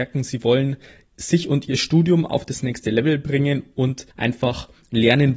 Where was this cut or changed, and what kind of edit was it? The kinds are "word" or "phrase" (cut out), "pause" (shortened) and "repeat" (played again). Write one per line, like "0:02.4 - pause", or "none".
0:04.1 - pause